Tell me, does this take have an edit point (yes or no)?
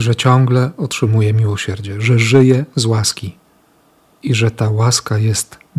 no